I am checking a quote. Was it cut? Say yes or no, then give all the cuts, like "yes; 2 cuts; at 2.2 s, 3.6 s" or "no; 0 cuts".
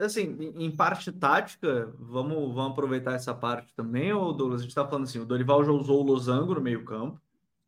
no; 0 cuts